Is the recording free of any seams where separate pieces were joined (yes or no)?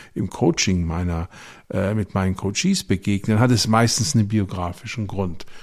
yes